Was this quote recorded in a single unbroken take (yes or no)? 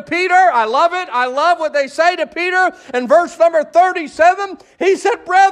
yes